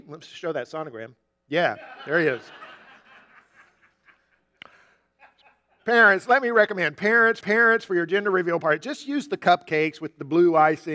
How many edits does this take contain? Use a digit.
1